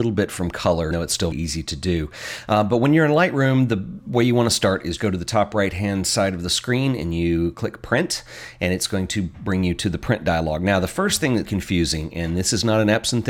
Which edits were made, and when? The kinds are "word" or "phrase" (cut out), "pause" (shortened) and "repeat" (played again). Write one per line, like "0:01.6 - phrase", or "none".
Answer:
0:00.9 - word
0:01.3 - word
0:05.0 - word
0:11.4 - word